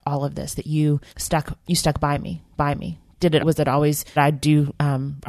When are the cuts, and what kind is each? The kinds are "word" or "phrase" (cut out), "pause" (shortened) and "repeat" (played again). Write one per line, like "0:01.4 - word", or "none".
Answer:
0:01.1 - pause
0:02.6 - repeat
0:03.4 - word
0:04.2 - phrase